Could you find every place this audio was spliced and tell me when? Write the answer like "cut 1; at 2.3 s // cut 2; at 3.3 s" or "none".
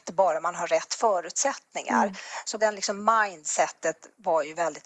cut 1; at 2.6 s